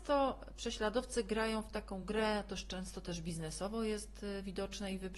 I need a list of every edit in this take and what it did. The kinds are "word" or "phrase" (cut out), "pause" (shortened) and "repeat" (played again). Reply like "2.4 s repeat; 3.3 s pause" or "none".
none